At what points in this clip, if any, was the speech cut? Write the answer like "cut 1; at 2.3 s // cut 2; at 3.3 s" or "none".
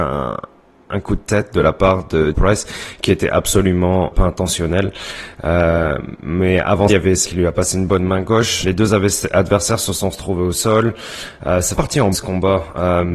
cut 1; at 2.3 s // cut 2; at 4.1 s // cut 3; at 6.9 s // cut 4; at 7.2 s // cut 5; at 8.6 s // cut 6; at 11.7 s // cut 7; at 12.1 s

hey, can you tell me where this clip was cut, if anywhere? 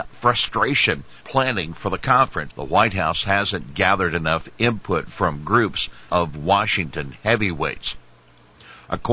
cut 1; at 1.2 s // cut 2; at 2.5 s // cut 3; at 6.1 s

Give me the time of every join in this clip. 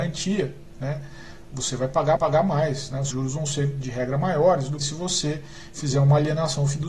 cut 1; at 2.2 s // cut 2; at 3.1 s // cut 3; at 4.8 s

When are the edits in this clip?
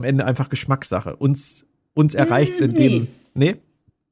none

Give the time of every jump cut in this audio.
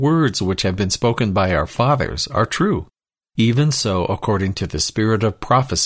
none

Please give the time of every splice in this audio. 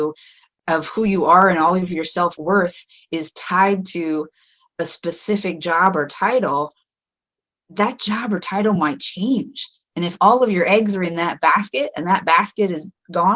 none

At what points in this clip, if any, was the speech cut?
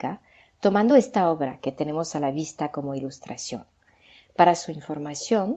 none

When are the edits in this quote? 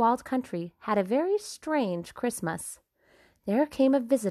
none

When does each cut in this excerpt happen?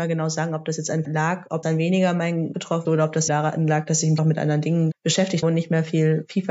cut 1; at 1.0 s // cut 2; at 1.6 s // cut 3; at 2.5 s // cut 4; at 2.8 s // cut 5; at 3.3 s // cut 6; at 4.2 s // cut 7; at 4.9 s // cut 8; at 5.4 s

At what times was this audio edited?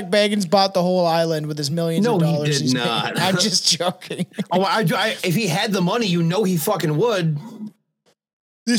none

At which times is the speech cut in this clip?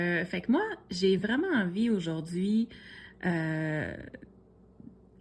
none

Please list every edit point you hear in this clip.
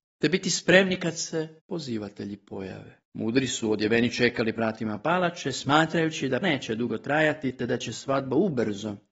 cut 1; at 1.6 s // cut 2; at 3.0 s // cut 3; at 4.6 s // cut 4; at 6.4 s

